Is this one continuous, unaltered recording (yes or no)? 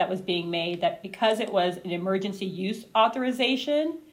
yes